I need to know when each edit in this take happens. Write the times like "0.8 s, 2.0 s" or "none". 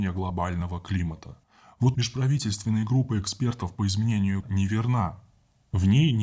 1.9 s, 4.4 s